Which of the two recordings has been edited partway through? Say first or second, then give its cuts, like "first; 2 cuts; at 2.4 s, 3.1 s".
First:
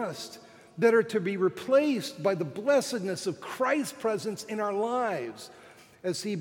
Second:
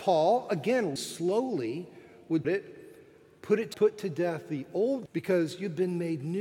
second; 4 cuts; at 1.0 s, 2.4 s, 3.7 s, 5.1 s